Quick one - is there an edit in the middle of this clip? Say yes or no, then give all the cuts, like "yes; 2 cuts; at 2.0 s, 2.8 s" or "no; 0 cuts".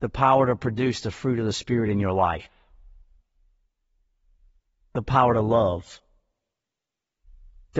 no; 0 cuts